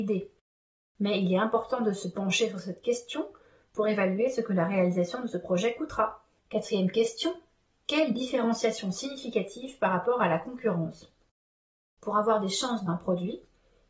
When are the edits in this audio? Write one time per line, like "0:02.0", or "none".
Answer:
0:12.9